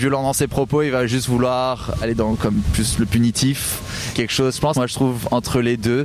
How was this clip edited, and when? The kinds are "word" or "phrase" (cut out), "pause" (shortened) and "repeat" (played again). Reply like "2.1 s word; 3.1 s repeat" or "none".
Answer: 2.0 s word; 4.1 s word; 4.7 s phrase